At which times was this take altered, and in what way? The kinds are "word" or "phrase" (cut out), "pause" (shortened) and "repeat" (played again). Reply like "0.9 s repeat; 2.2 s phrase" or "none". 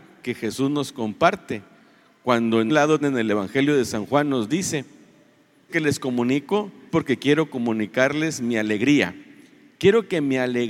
2.7 s word; 3.0 s word; 5.7 s word; 6.9 s word

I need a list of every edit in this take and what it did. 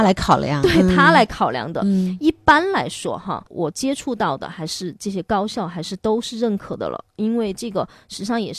none

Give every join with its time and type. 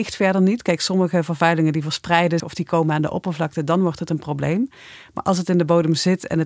2.4 s word

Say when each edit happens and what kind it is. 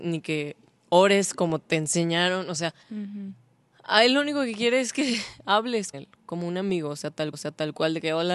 2.8 s pause; 5.9 s word; 7.3 s repeat

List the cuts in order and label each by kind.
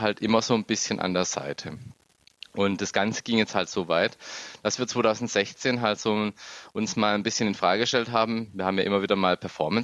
none

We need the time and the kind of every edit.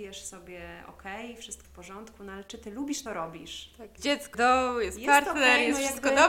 1.6 s word; 3.1 s word; 4.0 s word; 4.3 s word

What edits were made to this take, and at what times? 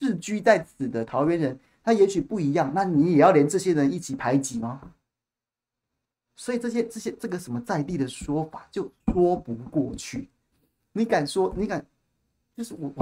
9.0 s pause

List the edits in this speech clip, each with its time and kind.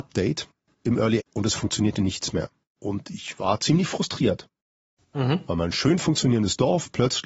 1.2 s word; 2.7 s pause

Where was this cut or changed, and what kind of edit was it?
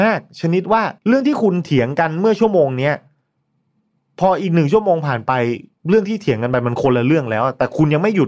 1.0 s pause

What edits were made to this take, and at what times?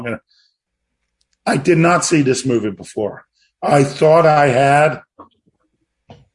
none

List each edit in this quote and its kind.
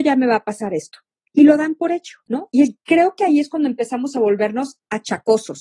none

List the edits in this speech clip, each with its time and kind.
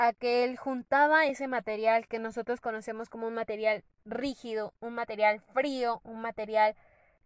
none

